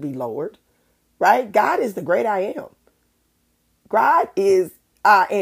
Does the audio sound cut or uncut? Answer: uncut